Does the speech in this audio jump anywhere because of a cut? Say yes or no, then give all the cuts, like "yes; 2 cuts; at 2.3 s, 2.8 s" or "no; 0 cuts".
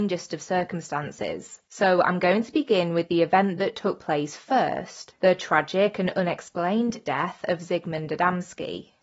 no; 0 cuts